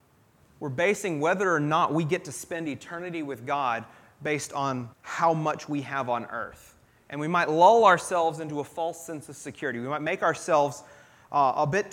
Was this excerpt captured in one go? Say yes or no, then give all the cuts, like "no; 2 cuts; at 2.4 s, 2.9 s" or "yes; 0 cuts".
no; 1 cut; at 4.9 s